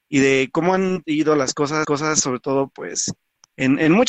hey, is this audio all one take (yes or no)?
no